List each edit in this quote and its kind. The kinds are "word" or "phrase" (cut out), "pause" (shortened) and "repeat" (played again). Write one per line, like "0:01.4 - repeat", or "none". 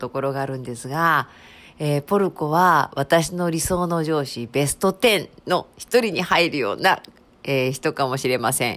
none